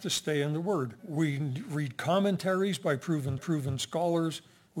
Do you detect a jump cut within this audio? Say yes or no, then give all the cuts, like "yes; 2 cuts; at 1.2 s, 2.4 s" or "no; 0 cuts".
yes; 2 cuts; at 1.0 s, 3.4 s